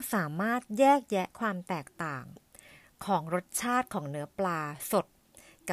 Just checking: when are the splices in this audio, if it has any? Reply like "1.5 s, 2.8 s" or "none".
none